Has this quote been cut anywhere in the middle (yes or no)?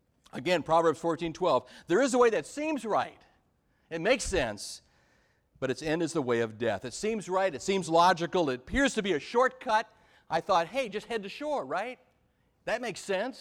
no